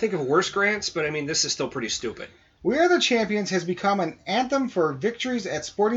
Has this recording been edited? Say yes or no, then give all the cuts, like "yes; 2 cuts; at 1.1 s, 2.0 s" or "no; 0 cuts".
no; 0 cuts